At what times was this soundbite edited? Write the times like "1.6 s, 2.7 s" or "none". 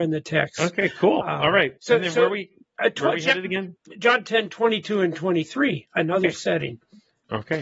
1.8 s